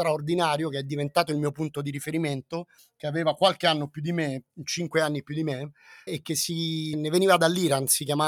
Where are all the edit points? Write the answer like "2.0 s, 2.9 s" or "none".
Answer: 2.8 s, 6.1 s, 6.9 s